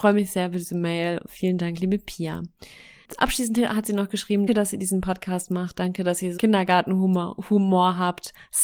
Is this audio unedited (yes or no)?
no